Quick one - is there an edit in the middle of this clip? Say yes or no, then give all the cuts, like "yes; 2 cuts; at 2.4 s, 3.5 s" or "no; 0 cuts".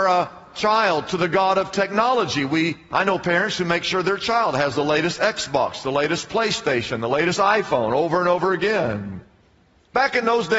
no; 0 cuts